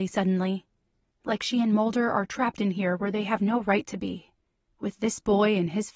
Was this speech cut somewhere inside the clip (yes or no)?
no